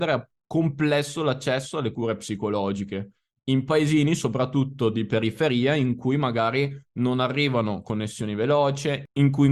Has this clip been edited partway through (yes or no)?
no